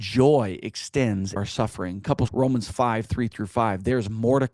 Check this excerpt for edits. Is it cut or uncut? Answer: cut